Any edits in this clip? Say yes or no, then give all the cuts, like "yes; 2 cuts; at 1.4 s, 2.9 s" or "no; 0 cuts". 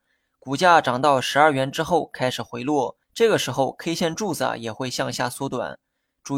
yes; 1 cut; at 3.0 s